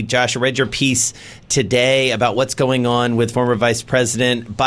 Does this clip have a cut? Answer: no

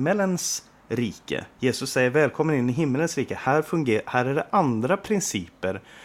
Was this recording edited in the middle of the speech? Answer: no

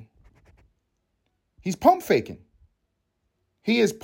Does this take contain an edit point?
no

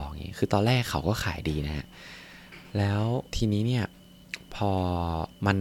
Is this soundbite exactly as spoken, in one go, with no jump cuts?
no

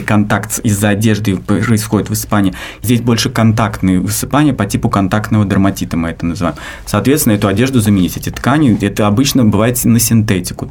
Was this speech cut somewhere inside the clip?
no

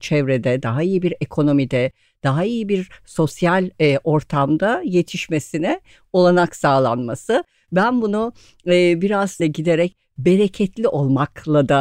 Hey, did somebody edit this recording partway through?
yes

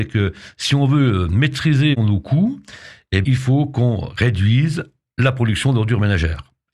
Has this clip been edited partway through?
yes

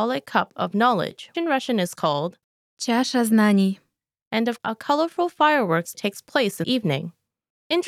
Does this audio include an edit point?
yes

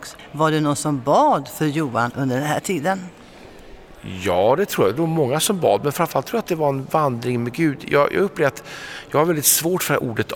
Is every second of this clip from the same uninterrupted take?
yes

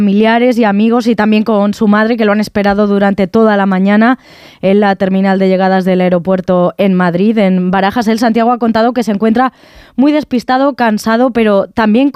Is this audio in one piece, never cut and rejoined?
yes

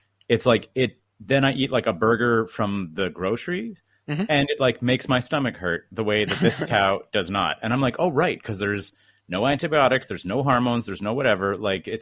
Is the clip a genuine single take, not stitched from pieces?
yes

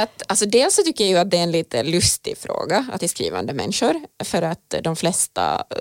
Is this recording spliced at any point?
yes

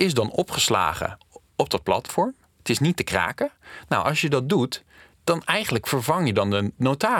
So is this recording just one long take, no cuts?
yes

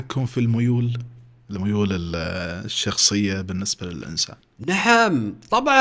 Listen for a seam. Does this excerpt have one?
no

